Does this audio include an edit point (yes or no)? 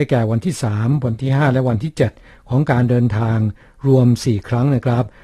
no